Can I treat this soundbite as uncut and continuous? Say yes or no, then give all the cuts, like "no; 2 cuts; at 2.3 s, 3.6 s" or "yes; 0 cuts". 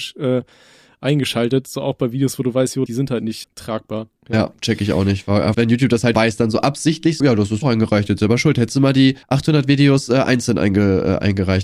no; 8 cuts; at 2.9 s, 3.4 s, 4.2 s, 5.5 s, 6.1 s, 7.2 s, 7.6 s, 9.2 s